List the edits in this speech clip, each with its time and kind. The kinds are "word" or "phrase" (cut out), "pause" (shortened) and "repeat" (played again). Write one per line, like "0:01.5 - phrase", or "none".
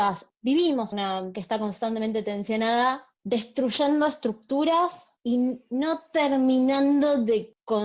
0:00.9 - word
0:01.3 - word